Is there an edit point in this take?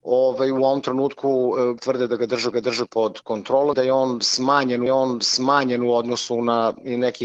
yes; 4 cuts; at 1.8 s, 2.5 s, 3.7 s, 4.9 s

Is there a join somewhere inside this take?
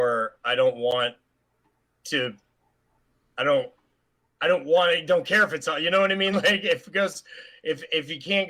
no; 0 cuts

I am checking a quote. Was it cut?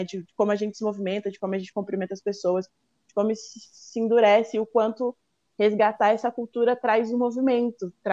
no; 0 cuts

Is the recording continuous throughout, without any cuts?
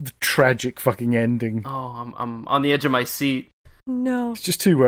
yes; 0 cuts

